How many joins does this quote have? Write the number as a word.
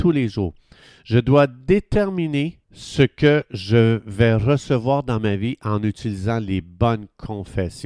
one